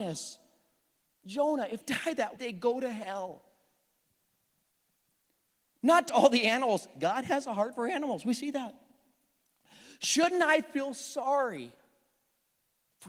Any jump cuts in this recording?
yes; 3 cuts; at 1.8 s, 2.4 s, 6.1 s

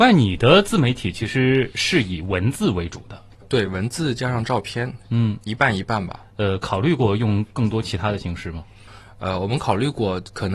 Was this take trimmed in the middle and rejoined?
no; 0 cuts

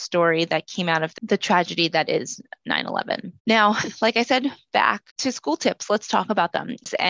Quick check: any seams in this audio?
yes; 2 cuts; at 3.4 s, 5.1 s

